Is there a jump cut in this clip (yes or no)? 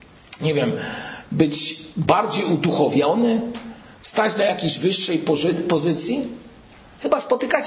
no